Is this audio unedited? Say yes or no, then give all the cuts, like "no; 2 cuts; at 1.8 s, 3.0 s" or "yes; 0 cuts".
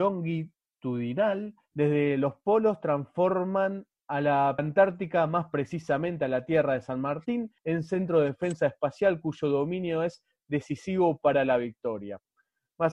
no; 2 cuts; at 4.6 s, 7.6 s